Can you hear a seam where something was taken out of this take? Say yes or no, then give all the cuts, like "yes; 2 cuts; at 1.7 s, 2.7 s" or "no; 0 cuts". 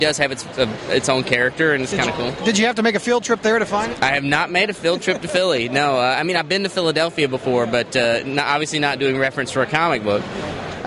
no; 0 cuts